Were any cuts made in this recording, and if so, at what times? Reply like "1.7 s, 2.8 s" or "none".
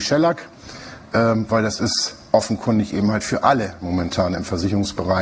none